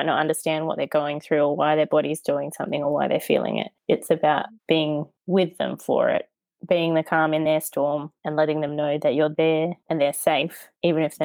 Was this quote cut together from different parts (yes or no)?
no